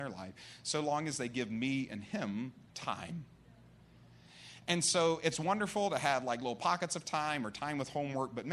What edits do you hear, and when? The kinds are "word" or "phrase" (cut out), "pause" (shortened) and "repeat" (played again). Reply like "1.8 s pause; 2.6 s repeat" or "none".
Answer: 2.7 s pause